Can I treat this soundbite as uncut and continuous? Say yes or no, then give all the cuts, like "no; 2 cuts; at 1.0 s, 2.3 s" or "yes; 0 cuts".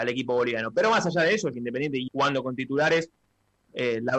no; 2 cuts; at 1.5 s, 2.1 s